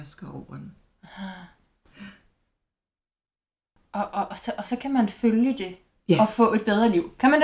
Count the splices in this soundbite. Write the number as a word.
zero